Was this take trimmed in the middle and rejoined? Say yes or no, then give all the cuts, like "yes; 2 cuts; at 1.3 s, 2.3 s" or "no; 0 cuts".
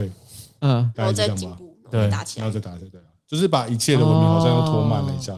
no; 0 cuts